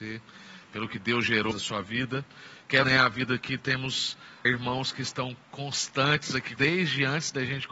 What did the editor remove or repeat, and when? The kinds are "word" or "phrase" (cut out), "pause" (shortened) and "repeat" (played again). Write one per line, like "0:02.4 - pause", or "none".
0:01.5 - word
0:02.8 - word
0:04.4 - word
0:06.6 - word

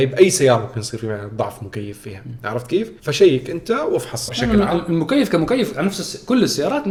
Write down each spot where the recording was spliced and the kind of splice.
0:03.0 - pause
0:04.3 - word

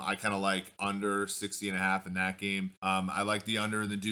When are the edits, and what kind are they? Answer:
0:02.8 - pause

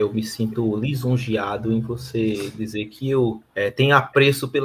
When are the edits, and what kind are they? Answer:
0:03.4 - pause

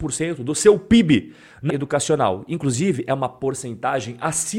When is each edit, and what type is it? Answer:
0:01.7 - word

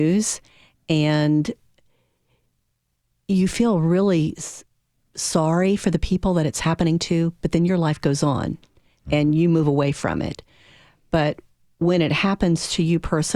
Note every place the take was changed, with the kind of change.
none

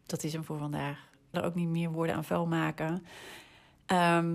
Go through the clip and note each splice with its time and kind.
0:01.3 - word

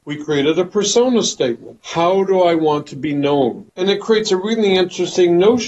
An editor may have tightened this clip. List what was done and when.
none

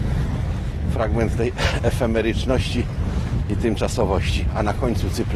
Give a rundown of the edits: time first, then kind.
none

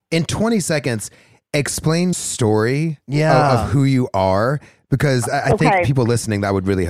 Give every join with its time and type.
0:02.1 - word

